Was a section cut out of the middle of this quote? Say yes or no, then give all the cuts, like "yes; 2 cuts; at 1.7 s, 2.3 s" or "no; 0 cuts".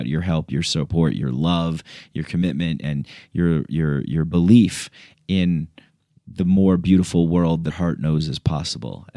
yes; 1 cut; at 7.7 s